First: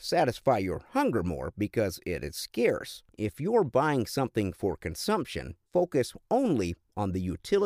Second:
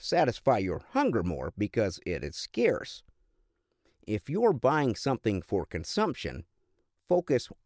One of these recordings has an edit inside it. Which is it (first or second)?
first